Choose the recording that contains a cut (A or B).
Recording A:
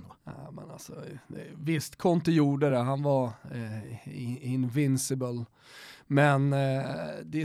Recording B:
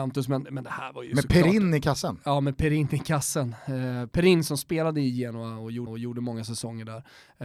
B